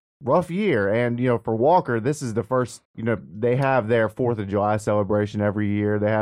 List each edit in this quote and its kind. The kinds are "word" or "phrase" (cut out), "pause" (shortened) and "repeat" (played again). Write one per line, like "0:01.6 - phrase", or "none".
0:02.9 - pause